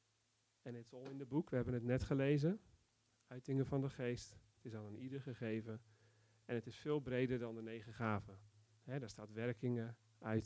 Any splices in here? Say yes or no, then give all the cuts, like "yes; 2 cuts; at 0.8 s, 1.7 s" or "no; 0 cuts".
no; 0 cuts